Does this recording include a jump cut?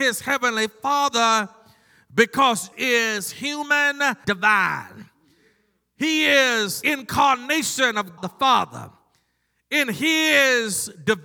yes; 4 cuts; at 2.7 s, 4.2 s, 6.8 s, 8.2 s

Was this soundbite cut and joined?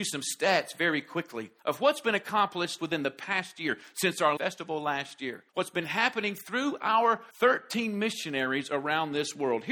yes; 5 cuts; at 1.6 s, 2.8 s, 4.4 s, 5.5 s, 7.3 s

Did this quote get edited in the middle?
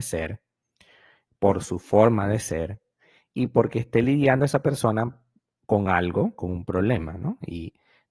no; 0 cuts

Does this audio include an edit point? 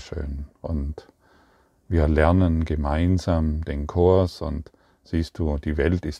no; 0 cuts

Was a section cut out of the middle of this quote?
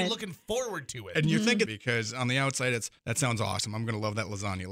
yes; 2 cuts; at 1.7 s, 3.0 s

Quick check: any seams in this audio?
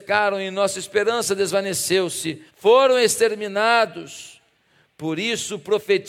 yes; 1 cut; at 2.5 s

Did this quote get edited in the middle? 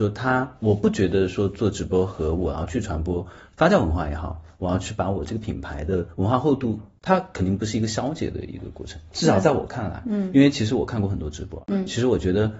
no; 0 cuts

